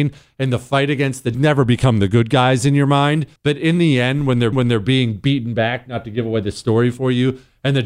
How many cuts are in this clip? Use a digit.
3